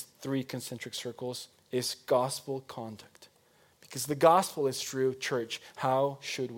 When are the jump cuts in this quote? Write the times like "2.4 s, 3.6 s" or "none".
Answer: 1.5 s

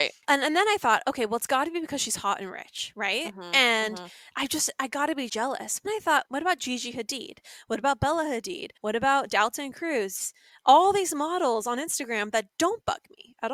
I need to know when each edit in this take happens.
5.3 s, 5.8 s, 6.2 s, 8.8 s

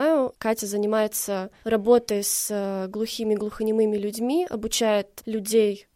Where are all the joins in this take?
none

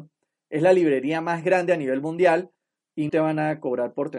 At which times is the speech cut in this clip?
3.1 s

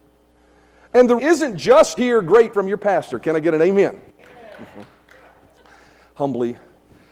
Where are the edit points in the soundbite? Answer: 1.2 s, 2.0 s, 2.5 s

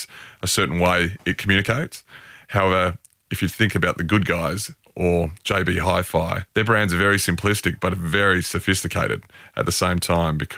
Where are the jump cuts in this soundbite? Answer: 6.5 s

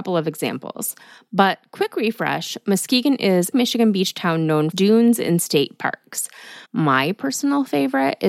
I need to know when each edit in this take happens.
3.5 s, 4.7 s, 6.6 s

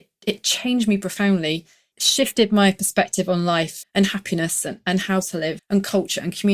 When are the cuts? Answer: 1.9 s, 3.8 s, 5.6 s

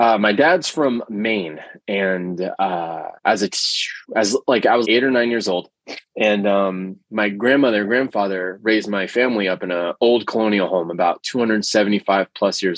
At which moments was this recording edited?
3.2 s, 4.0 s, 4.8 s, 6.1 s, 11.2 s

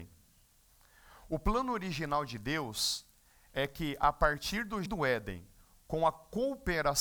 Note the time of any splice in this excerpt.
4.9 s

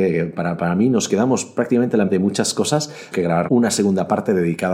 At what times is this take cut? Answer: 2.1 s, 3.1 s, 3.5 s

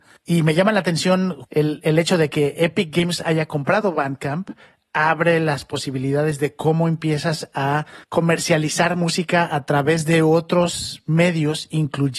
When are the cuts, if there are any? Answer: none

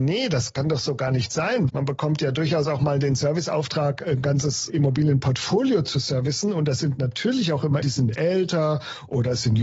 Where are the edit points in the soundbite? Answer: 1.7 s, 4.7 s, 7.8 s

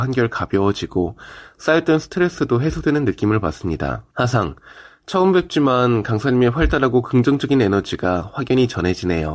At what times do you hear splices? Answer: 4.1 s

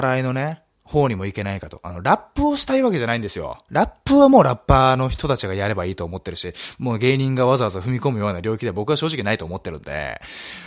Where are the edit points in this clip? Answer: none

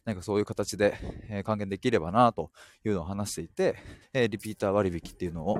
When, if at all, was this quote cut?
4.0 s

